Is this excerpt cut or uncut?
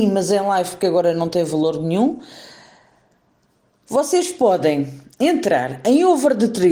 uncut